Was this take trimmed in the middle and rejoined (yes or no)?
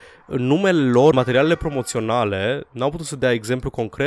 yes